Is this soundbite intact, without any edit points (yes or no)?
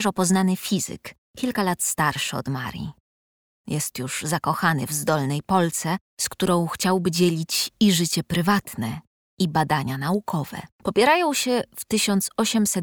no